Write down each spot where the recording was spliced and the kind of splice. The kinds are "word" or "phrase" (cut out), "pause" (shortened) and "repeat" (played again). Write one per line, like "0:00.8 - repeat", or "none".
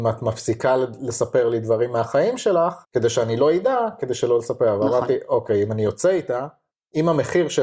0:02.8 - pause